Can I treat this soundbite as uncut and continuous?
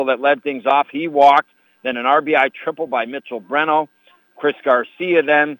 yes; 0 cuts

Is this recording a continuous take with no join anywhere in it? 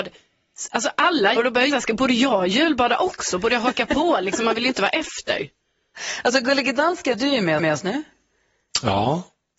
no; 4 cuts; at 1.4 s, 1.7 s, 7.1 s, 7.6 s

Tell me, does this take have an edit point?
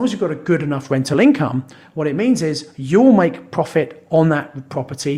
no; 0 cuts

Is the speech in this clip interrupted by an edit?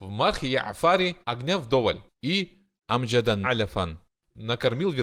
yes; 3 cuts; at 1.2 s, 2.1 s, 3.4 s

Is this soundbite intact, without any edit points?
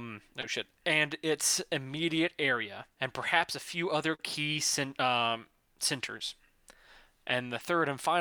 yes; 0 cuts

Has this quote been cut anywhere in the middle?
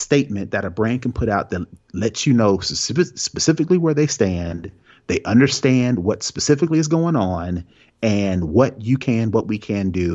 no; 0 cuts

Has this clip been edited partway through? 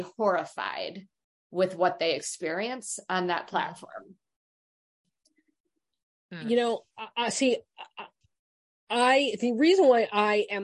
no; 0 cuts

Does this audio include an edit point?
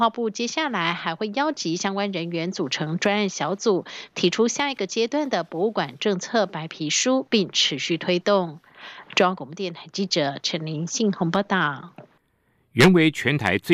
no; 0 cuts

